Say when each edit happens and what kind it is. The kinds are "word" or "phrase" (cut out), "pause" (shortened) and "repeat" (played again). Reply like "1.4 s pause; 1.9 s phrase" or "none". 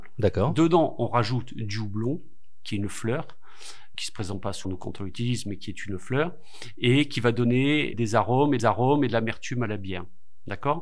3.9 s word; 4.6 s word; 7.9 s word; 8.6 s repeat